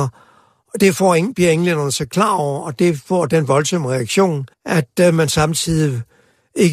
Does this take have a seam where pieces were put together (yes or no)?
yes